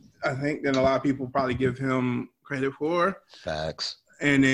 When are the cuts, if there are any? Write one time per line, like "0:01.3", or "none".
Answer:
none